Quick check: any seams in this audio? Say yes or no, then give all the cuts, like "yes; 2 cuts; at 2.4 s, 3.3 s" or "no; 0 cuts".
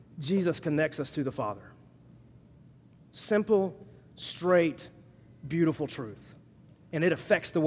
no; 0 cuts